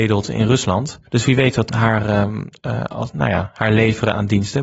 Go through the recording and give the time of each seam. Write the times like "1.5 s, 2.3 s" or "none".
1.1 s, 1.7 s